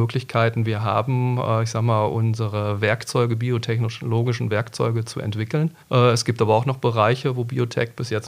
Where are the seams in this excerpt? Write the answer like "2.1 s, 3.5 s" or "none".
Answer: 5.8 s